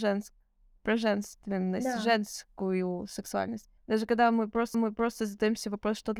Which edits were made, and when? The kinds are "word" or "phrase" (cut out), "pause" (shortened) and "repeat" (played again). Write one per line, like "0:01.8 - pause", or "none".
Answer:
0:03.8 - pause
0:04.7 - repeat